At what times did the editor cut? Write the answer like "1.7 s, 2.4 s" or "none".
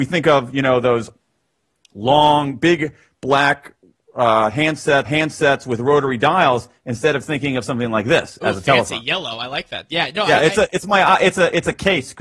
5.1 s